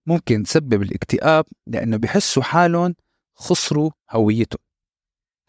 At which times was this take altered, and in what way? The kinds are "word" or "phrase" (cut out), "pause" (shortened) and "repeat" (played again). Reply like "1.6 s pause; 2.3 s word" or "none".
none